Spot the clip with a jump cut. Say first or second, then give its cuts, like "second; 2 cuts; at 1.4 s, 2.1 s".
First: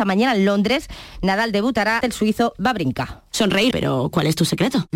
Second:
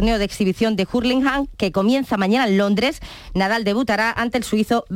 first; 2 cuts; at 2.0 s, 3.7 s